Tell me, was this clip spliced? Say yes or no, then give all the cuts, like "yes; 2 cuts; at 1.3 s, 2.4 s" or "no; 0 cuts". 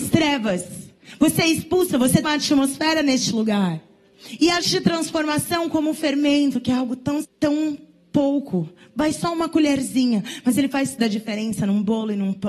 yes; 4 cuts; at 2.2 s, 4.6 s, 7.2 s, 11.0 s